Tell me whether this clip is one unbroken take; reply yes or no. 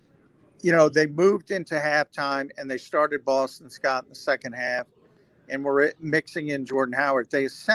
yes